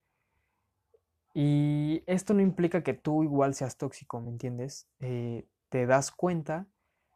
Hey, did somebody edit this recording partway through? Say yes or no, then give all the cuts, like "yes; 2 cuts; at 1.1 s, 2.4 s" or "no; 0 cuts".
no; 0 cuts